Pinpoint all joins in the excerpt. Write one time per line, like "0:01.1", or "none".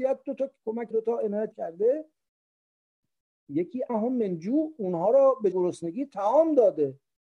0:00.9
0:01.5
0:03.9
0:05.5